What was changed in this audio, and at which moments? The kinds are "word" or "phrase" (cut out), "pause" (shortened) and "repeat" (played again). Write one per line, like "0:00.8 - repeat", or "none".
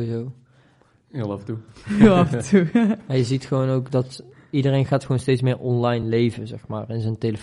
none